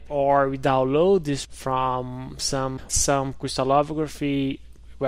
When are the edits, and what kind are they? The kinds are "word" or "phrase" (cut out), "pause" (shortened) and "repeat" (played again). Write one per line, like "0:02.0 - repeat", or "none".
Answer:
0:01.4 - word
0:02.9 - word